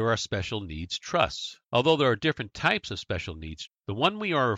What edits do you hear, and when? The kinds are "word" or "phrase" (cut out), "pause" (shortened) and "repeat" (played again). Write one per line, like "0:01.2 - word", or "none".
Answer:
0:01.6 - pause
0:03.7 - word